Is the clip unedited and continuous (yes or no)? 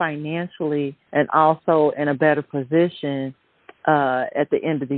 no